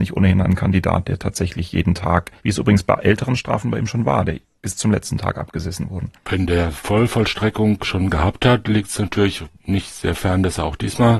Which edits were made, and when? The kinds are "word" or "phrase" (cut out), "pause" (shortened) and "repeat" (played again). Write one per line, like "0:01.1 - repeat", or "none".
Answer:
0:02.4 - pause
0:06.2 - pause